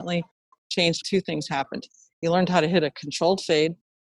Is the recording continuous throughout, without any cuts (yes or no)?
no